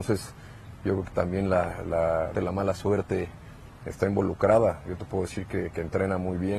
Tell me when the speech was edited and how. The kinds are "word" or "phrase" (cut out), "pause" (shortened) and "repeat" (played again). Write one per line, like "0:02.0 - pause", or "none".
0:02.3 - word